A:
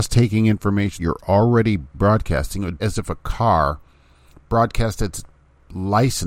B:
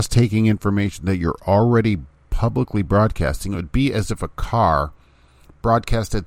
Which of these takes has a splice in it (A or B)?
A